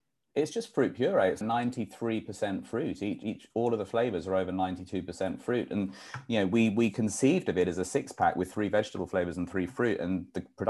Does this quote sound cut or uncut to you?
cut